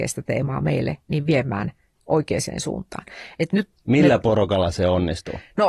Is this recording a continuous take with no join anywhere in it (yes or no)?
yes